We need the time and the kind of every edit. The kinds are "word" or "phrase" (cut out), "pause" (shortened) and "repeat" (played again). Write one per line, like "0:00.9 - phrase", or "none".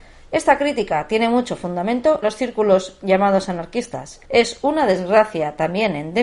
0:02.2 - phrase
0:04.2 - pause

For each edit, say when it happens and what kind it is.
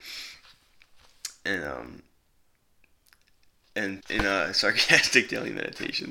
0:04.0 - word

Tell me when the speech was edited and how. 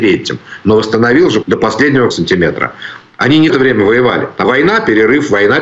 0:01.4 - word
0:02.1 - word
0:03.5 - word
0:04.4 - word

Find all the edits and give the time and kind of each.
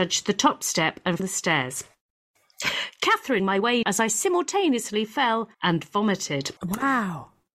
0:01.2 - phrase
0:03.4 - word
0:03.8 - word
0:05.5 - pause
0:06.6 - pause

